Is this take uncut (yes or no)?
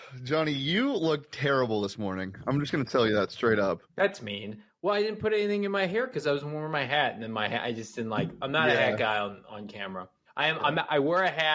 no